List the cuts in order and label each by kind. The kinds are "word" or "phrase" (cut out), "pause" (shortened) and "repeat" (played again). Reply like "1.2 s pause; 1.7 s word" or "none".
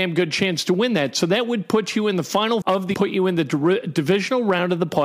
2.6 s word; 2.9 s word

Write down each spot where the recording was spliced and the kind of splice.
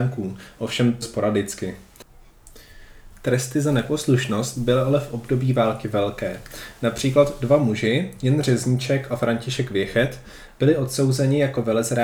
1.0 s word

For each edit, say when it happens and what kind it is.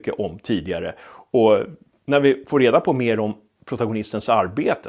2.0 s word

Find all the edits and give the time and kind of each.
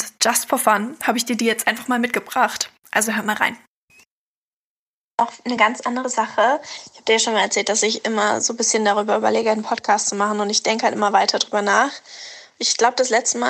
none

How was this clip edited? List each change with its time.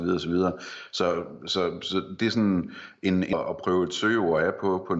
3.3 s phrase

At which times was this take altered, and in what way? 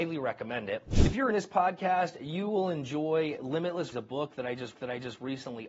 1.3 s word; 3.9 s phrase; 4.7 s repeat

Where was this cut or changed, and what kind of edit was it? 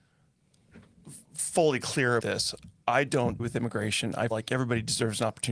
2.2 s word; 3.4 s word; 4.3 s word

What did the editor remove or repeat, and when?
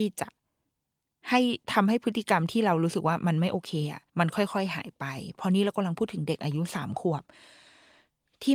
1.6 s pause; 4.1 s pause

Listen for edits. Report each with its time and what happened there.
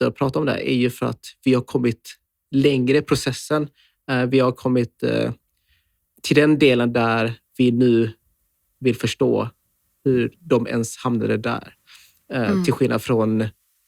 none

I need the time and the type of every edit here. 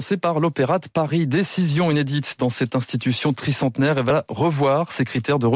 none

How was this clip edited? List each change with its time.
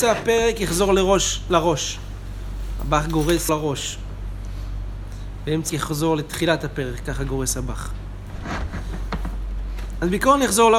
3.5 s word; 5.7 s word

